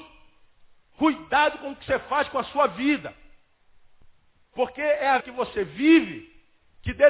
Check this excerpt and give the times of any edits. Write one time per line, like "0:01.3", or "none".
0:05.2

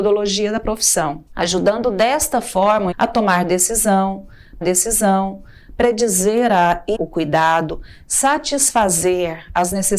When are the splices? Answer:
0:01.3
0:02.9
0:04.6
0:06.9

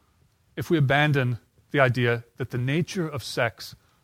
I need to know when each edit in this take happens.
none

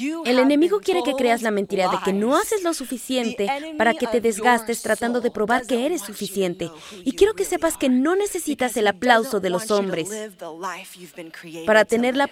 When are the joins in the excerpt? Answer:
none

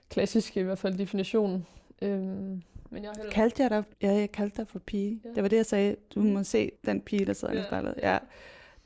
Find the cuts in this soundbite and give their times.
0:03.9
0:06.8

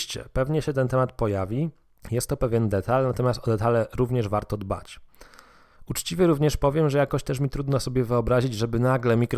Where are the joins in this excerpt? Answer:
none

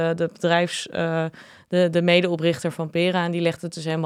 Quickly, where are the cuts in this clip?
none

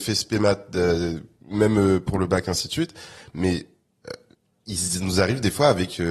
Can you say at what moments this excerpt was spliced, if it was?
none

